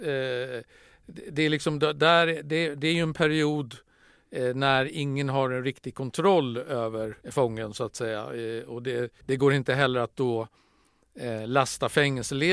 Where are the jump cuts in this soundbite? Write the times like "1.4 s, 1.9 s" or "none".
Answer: 7.2 s, 9.2 s